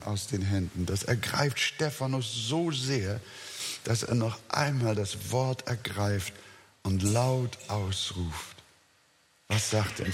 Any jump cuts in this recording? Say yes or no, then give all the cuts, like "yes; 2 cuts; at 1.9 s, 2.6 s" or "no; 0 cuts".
no; 0 cuts